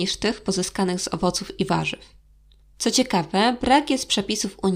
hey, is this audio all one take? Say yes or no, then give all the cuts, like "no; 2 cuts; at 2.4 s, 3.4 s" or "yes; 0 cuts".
yes; 0 cuts